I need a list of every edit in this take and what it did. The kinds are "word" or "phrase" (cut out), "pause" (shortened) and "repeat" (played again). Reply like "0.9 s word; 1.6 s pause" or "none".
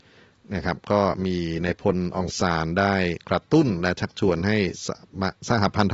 none